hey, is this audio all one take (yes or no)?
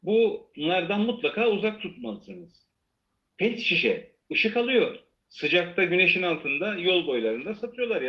yes